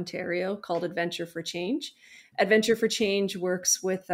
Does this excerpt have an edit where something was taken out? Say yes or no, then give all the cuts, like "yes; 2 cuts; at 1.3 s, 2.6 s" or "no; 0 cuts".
no; 0 cuts